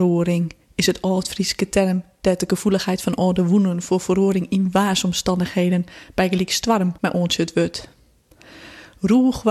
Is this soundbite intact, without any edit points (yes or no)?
no